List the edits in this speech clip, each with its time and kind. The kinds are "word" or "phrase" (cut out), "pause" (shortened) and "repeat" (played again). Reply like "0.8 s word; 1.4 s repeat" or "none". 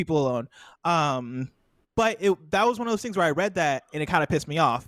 none